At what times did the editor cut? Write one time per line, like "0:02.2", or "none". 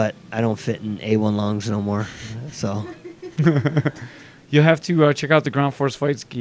none

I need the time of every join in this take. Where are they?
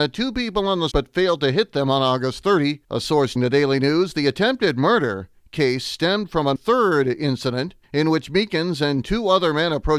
0:00.9
0:02.8
0:03.4
0:06.6
0:07.8

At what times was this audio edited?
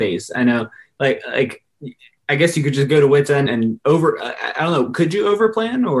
0:03.5

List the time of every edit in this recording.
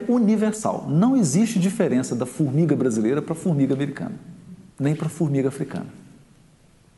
0:04.7

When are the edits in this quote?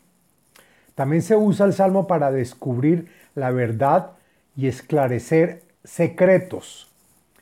none

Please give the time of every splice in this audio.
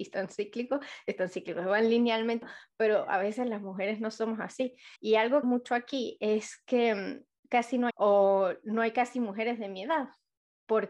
0:02.4
0:05.0
0:05.4
0:07.9

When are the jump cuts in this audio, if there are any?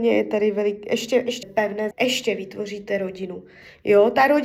0:01.4
0:01.9

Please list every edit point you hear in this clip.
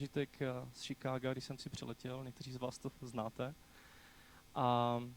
0:01.6

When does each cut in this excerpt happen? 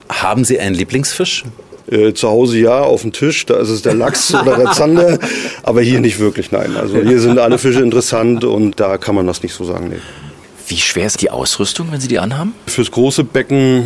0:08.7
0:11.2

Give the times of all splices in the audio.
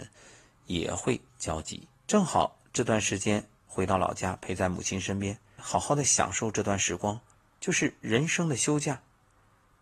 0:01.3
0:01.9
0:05.6
0:07.3

